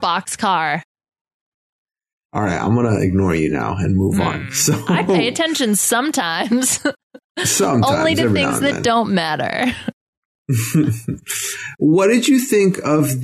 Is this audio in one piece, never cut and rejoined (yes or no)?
yes